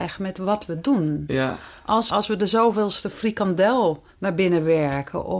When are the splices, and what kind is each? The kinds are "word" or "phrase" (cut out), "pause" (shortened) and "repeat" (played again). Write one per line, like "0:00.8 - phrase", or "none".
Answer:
0:02.1 - word
0:04.1 - pause